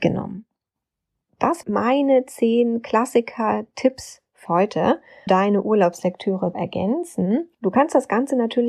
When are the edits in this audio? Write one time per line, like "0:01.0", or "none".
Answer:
0:01.6
0:04.5
0:05.3
0:06.5